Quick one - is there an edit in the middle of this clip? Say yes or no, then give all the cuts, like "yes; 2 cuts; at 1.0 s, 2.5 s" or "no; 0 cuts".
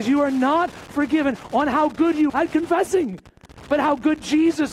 yes; 1 cut; at 2.3 s